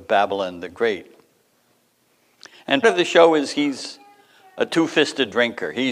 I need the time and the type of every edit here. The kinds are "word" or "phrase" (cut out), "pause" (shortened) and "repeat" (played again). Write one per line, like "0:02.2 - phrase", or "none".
0:02.8 - word